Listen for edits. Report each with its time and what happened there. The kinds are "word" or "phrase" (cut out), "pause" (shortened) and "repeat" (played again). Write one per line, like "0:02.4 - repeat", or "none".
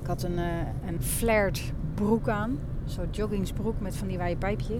0:01.0 - word